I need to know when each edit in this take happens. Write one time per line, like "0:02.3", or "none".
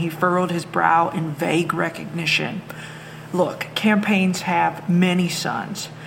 none